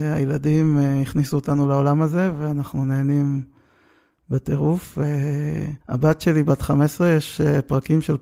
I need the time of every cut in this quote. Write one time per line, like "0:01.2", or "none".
0:05.8